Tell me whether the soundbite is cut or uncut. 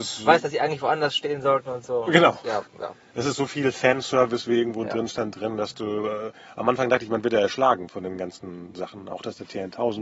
uncut